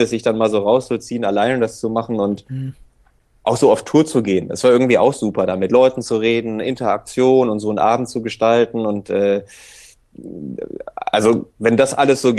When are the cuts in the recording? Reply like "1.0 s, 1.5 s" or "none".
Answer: none